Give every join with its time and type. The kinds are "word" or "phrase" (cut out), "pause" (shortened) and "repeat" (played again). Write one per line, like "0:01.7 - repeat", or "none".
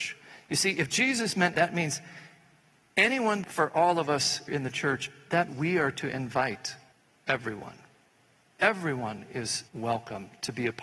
0:01.5 - word
0:03.4 - word
0:04.5 - word
0:05.5 - word
0:06.9 - pause
0:09.7 - pause